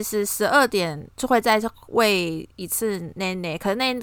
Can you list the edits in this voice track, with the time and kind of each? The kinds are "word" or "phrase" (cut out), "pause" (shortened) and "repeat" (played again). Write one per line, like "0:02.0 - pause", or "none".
0:01.1 - pause